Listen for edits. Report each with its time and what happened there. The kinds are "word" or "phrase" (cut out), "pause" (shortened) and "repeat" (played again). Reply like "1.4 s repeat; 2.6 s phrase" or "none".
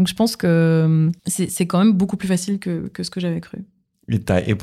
1.2 s pause

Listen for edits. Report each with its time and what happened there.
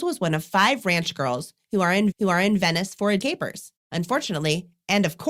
2.1 s repeat; 3.2 s phrase; 3.8 s pause

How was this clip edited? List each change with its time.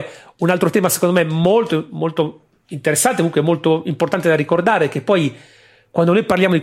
none

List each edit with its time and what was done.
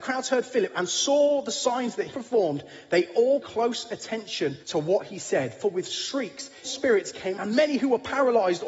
2.1 s word; 3.4 s word; 4.6 s pause; 6.6 s word; 7.3 s phrase

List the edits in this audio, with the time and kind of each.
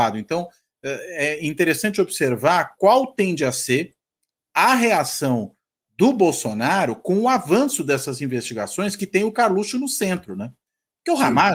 none

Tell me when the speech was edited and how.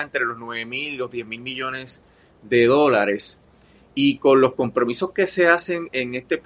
none

